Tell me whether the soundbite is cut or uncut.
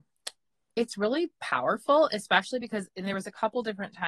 uncut